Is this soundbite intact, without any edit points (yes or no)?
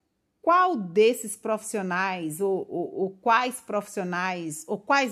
yes